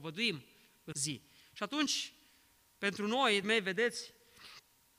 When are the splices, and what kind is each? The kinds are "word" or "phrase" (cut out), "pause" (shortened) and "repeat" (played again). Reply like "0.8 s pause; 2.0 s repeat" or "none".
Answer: 0.9 s word; 3.4 s word